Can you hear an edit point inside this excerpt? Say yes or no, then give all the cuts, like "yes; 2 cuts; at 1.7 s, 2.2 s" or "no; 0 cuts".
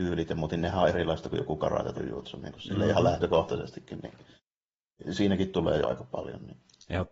yes; 3 cuts; at 0.9 s, 1.9 s, 5.8 s